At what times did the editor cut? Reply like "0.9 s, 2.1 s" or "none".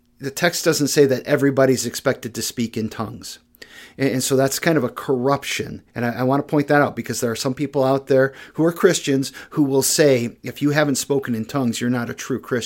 5.9 s